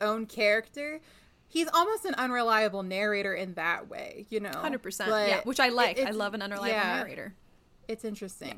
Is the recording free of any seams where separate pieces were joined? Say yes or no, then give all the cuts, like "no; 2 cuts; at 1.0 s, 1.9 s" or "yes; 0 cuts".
yes; 0 cuts